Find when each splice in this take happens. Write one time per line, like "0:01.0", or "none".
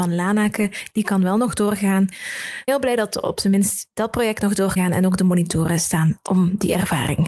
0:02.7
0:04.8
0:06.3